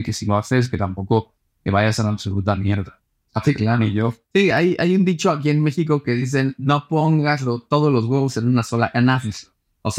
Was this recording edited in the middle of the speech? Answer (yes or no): no